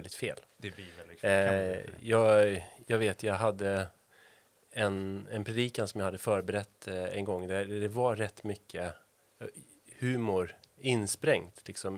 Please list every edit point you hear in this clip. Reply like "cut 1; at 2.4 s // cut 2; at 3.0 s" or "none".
none